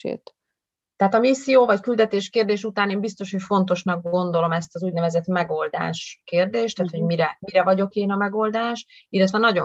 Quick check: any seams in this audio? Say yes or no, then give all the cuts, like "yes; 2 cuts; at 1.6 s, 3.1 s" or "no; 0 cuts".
no; 0 cuts